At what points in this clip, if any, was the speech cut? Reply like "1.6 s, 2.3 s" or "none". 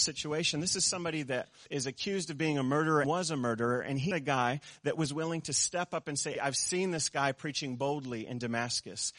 1.7 s, 3.0 s, 4.1 s, 6.3 s